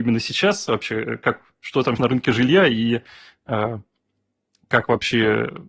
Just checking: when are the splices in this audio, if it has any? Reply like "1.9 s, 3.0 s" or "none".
2.0 s